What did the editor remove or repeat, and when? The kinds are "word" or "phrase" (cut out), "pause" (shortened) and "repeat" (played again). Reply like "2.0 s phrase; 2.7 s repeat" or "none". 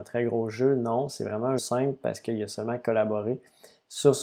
1.6 s word